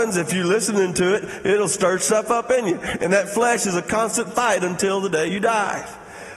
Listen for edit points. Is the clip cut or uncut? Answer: uncut